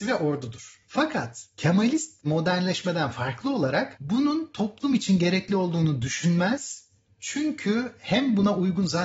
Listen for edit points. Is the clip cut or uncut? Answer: uncut